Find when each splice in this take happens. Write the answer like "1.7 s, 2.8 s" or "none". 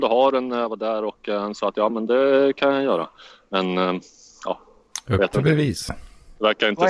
none

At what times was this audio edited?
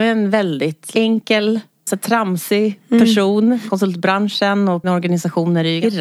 1.9 s, 4.8 s

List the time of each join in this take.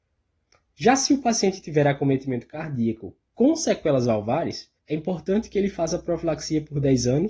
4.8 s

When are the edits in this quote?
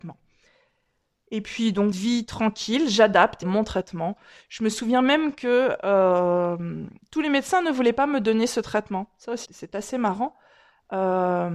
1.9 s, 3.4 s, 7.0 s, 9.5 s

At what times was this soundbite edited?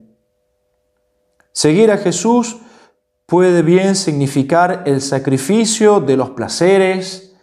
none

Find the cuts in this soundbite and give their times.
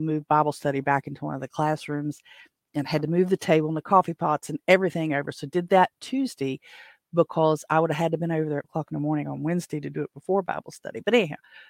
8.6 s

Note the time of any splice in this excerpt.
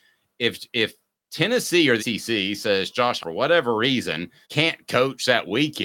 2.0 s, 3.2 s, 4.4 s

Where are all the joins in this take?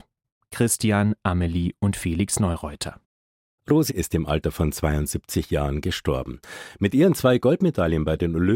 3.9 s

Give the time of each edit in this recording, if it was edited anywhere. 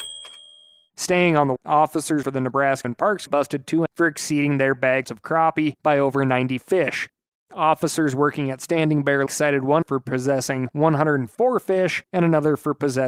1.6 s, 2.2 s, 2.8 s, 3.3 s, 3.9 s, 5.0 s, 9.3 s, 9.8 s

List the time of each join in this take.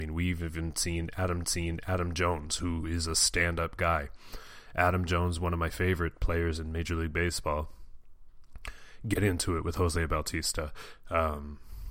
1.4 s

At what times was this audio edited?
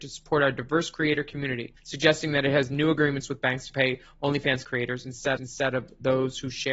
1.8 s, 4.6 s, 5.4 s

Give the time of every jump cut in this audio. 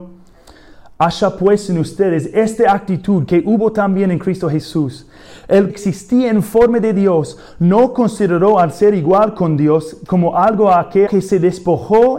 5.7 s, 11.1 s

